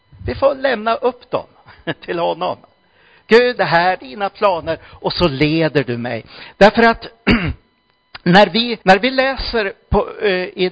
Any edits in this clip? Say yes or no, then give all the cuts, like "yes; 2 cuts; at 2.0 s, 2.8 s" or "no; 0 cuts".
yes; 3 cuts; at 3.6 s, 4.0 s, 8.8 s